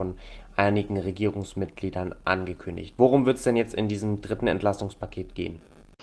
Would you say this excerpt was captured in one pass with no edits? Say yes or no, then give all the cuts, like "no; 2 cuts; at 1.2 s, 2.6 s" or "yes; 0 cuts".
yes; 0 cuts